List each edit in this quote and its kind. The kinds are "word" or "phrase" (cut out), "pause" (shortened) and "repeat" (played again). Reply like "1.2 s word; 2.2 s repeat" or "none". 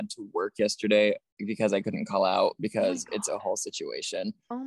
none